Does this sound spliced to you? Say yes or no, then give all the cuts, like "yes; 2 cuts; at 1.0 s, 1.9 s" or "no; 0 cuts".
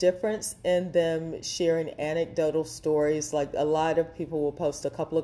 no; 0 cuts